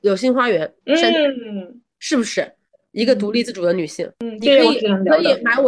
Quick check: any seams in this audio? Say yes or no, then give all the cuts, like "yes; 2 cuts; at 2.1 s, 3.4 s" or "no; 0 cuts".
no; 0 cuts